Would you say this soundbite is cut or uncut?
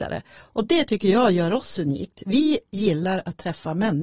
uncut